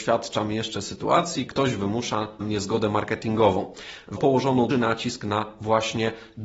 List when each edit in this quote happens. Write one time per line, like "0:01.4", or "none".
0:01.5
0:02.4
0:04.2
0:04.7